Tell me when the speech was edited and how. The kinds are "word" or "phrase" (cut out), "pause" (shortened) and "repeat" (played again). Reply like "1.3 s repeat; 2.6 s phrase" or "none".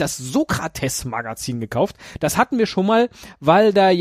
none

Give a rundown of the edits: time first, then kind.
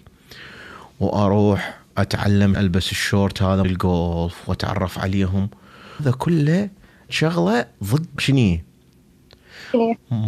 2.6 s word; 3.6 s word; 6.0 s word; 7.1 s word; 8.2 s word

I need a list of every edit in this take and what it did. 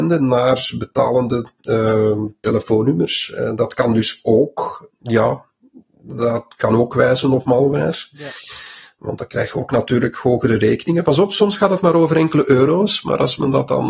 4.9 s word

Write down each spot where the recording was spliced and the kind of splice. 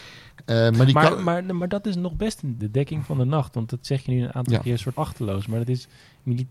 2.6 s word; 4.9 s word

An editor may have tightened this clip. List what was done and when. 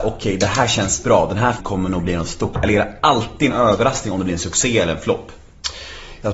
1.6 s word

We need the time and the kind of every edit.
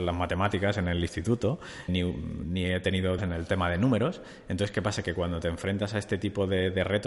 1.9 s word; 3.2 s phrase

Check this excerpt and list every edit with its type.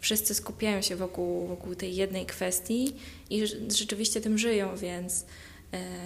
3.3 s word

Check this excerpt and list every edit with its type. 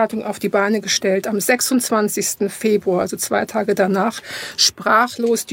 none

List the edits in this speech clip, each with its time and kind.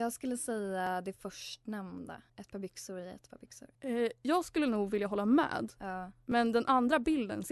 2.3 s pause; 3.7 s pause

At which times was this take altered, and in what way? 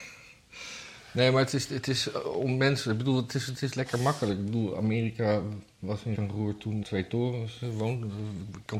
6.2 s word; 6.8 s word

